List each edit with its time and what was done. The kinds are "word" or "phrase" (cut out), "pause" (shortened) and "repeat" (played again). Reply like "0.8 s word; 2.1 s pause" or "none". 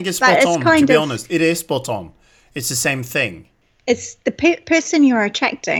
none